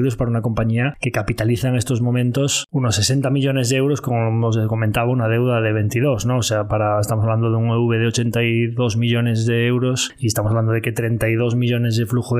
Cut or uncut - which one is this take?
uncut